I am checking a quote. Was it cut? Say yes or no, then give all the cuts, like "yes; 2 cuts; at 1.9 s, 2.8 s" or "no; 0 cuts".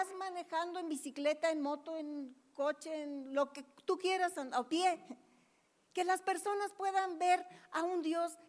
no; 0 cuts